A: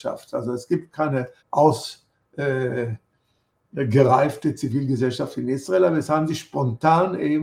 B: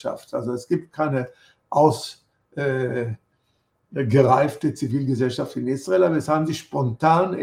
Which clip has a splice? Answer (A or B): A